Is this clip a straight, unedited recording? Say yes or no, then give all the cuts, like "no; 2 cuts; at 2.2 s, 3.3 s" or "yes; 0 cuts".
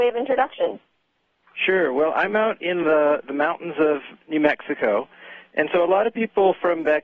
yes; 0 cuts